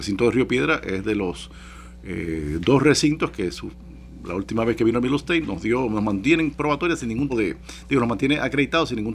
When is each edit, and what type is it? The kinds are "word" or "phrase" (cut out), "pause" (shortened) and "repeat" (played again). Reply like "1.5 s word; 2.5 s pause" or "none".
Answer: 5.4 s word; 7.3 s word